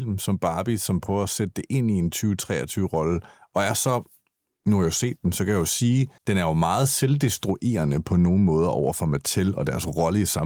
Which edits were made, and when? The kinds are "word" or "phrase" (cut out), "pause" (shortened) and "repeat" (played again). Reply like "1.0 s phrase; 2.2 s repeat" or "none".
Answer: 6.2 s pause